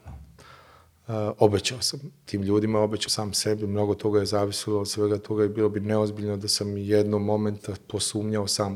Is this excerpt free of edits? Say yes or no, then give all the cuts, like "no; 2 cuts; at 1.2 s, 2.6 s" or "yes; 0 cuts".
no; 1 cut; at 3.1 s